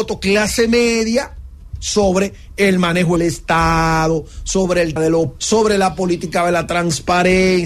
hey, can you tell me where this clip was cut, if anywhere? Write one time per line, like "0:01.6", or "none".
0:03.2
0:05.0
0:05.4